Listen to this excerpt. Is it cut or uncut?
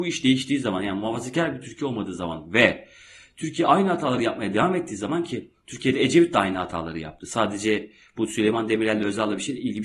uncut